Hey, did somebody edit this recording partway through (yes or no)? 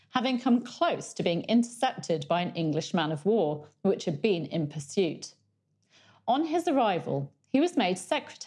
no